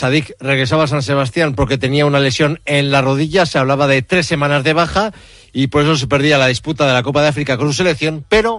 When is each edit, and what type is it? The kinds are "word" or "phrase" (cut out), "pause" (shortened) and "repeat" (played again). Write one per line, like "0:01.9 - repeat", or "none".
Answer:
none